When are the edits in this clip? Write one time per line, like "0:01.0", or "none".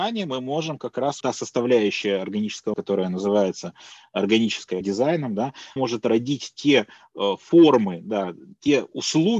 0:01.2
0:02.7
0:04.8
0:05.8